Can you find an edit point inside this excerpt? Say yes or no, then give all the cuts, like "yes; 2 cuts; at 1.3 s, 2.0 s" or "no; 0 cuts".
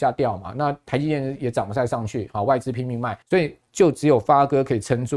yes; 1 cut; at 3.2 s